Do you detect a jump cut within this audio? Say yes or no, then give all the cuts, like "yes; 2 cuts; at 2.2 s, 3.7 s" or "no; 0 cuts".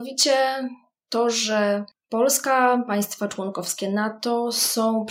no; 0 cuts